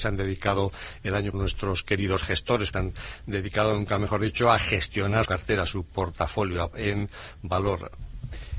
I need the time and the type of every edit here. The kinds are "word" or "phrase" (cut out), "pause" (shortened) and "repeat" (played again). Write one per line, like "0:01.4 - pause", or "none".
0:01.3 - word
0:02.7 - word
0:05.3 - word
0:06.7 - word